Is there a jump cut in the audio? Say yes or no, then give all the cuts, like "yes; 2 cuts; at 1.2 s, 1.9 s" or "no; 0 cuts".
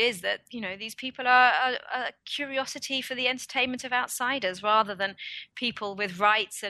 no; 0 cuts